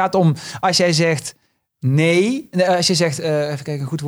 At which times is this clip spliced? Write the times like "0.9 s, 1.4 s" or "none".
none